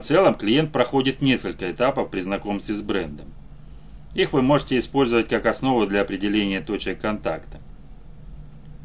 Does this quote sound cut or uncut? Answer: uncut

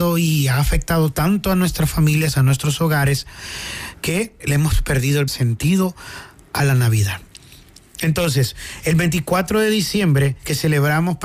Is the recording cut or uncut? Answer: cut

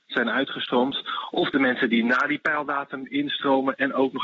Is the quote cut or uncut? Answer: uncut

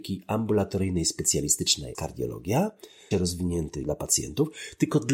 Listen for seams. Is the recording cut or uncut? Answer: cut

